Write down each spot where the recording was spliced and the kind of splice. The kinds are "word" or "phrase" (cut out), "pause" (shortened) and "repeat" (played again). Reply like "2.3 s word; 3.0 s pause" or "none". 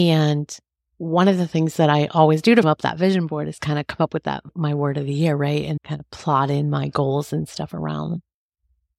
2.6 s word; 5.8 s word